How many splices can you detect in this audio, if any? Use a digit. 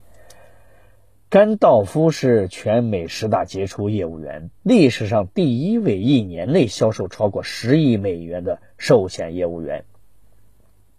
1